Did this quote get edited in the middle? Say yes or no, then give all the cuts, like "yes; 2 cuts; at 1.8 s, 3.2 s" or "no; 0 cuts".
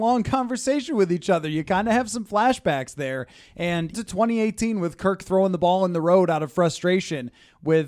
yes; 1 cut; at 3.9 s